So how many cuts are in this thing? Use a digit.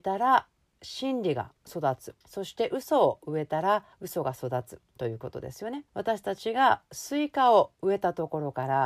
5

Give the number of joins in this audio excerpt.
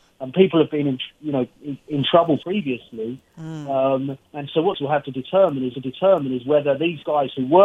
5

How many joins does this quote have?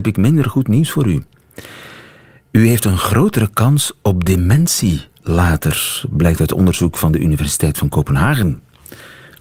0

